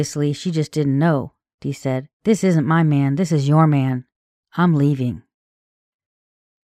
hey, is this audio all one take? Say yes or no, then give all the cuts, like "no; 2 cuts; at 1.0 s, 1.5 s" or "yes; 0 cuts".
no; 1 cut; at 2.1 s